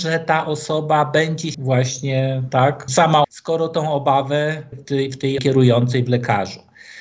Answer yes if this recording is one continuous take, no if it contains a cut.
no